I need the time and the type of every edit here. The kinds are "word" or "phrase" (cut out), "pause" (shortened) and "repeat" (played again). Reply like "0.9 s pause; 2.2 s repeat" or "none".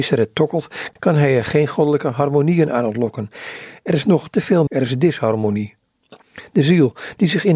4.7 s word